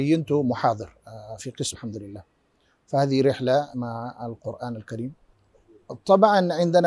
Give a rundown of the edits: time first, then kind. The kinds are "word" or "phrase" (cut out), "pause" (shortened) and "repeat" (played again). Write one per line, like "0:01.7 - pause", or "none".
0:01.4 - word
0:01.7 - word
0:03.7 - word